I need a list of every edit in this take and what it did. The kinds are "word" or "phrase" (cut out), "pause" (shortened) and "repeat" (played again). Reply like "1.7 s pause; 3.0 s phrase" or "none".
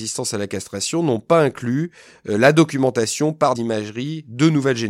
3.5 s word